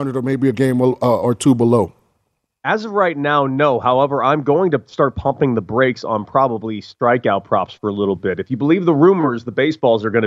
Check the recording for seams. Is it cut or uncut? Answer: uncut